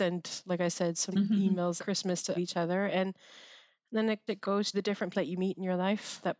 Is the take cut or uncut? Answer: cut